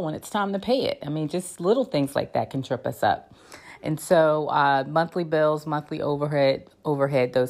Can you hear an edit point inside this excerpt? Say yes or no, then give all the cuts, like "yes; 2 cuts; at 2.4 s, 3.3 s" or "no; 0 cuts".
no; 0 cuts